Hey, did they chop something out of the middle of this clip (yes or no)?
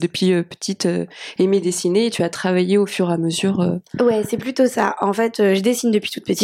no